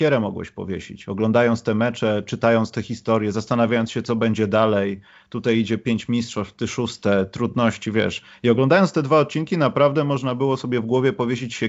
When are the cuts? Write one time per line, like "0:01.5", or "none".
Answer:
none